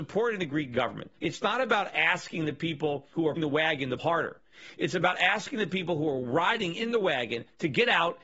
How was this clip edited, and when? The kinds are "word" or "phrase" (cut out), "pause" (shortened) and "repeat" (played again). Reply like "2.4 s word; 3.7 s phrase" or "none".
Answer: 3.4 s word; 4.0 s word